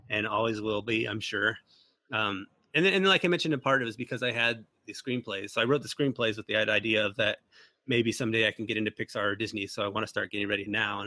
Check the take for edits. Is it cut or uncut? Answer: uncut